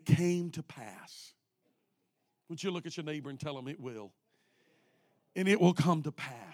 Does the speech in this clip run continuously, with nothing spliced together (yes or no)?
yes